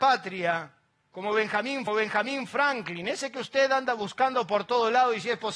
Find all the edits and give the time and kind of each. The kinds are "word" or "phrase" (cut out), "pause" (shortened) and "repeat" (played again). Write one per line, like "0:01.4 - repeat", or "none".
0:01.9 - repeat